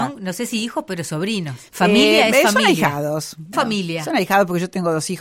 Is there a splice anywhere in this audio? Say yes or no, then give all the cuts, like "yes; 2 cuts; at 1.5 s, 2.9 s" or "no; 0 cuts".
yes; 2 cuts; at 1.7 s, 3.5 s